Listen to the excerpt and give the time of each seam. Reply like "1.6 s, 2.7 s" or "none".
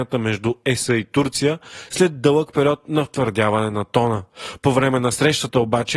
none